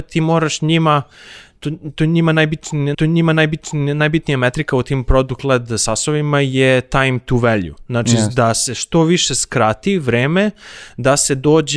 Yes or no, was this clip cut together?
yes